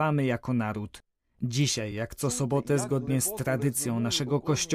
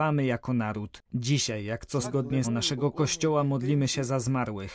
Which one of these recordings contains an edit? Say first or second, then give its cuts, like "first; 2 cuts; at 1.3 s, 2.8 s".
second; 3 cuts; at 1.0 s, 2.0 s, 2.4 s